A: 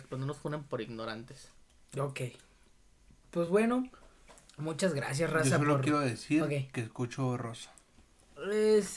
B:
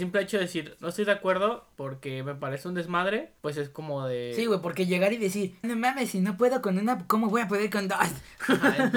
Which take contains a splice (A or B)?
B